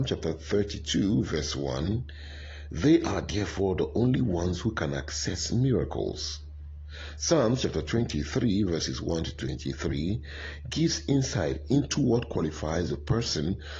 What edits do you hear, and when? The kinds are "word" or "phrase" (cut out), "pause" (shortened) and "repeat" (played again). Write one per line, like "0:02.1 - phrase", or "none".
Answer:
none